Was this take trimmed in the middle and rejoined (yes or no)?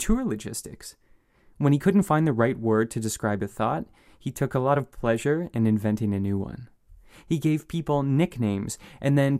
no